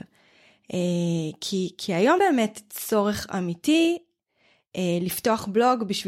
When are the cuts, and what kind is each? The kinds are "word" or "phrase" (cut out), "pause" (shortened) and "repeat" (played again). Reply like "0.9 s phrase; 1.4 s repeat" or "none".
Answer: 2.2 s word